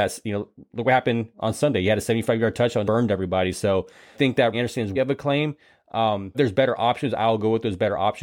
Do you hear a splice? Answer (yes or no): yes